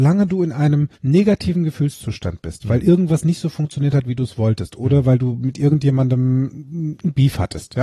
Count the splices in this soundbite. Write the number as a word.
one